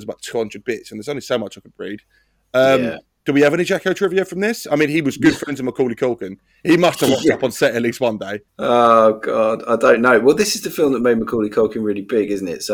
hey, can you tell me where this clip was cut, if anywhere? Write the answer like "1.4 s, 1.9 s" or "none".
8.5 s